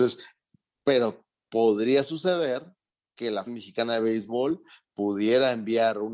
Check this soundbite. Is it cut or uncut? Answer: cut